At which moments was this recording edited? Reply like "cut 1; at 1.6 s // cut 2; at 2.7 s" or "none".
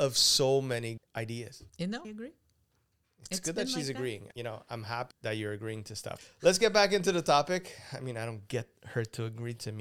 cut 1; at 1.0 s // cut 2; at 1.7 s // cut 3; at 2.0 s // cut 4; at 4.3 s // cut 5; at 5.1 s // cut 6; at 6.2 s // cut 7; at 8.8 s

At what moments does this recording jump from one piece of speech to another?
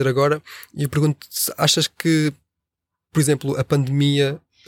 none

